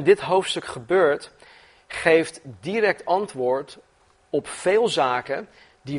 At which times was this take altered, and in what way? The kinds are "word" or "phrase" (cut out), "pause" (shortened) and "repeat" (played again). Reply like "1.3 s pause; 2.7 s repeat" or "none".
none